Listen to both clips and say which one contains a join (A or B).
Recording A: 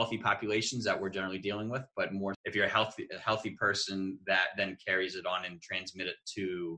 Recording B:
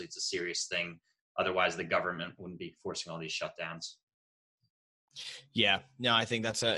A